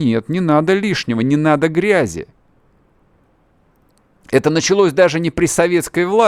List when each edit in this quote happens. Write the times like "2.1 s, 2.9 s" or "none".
none